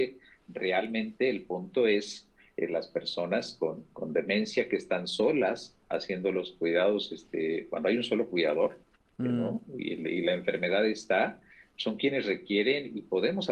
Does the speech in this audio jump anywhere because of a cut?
no; 0 cuts

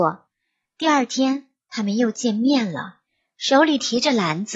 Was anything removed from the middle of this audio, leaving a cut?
no; 0 cuts

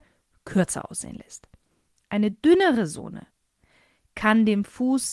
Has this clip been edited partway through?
no; 0 cuts

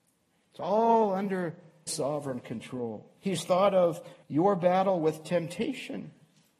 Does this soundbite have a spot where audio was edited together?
yes; 3 cuts; at 1.9 s, 3.2 s, 4.2 s

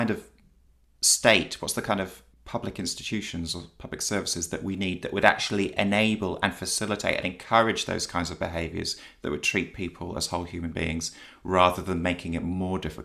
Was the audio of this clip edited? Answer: yes; 1 cut; at 2.3 s

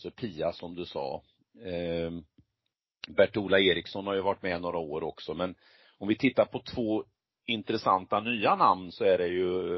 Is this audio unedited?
yes; 0 cuts

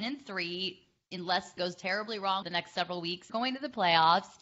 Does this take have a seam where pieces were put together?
yes; 3 cuts; at 1.6 s, 2.4 s, 3.3 s

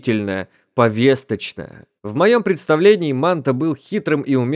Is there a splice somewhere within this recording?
yes; 1 cut; at 2.0 s

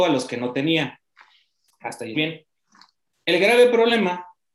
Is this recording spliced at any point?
yes; 1 cut; at 2.1 s

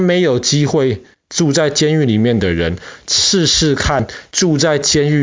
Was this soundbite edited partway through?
no; 0 cuts

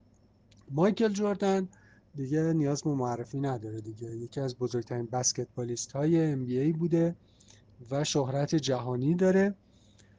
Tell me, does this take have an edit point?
no; 0 cuts

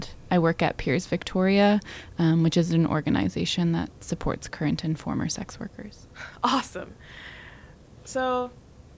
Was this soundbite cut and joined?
no; 0 cuts

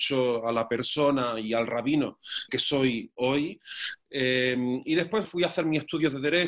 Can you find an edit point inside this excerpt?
yes; 2 cuts; at 2.5 s, 5.2 s

